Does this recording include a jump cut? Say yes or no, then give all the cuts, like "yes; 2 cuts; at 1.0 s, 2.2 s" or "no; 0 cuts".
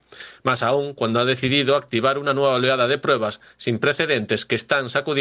no; 0 cuts